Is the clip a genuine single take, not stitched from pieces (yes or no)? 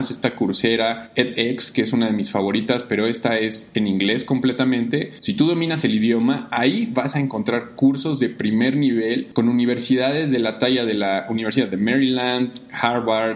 yes